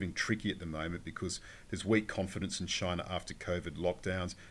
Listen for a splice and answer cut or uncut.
uncut